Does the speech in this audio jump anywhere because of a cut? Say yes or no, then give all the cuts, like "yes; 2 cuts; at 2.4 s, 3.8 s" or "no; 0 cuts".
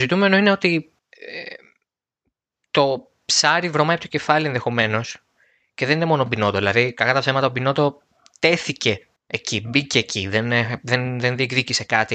yes; 2 cuts; at 1.0 s, 9.2 s